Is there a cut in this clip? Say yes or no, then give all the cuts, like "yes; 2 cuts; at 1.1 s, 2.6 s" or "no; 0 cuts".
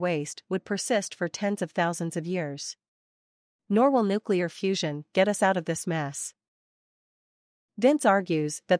no; 0 cuts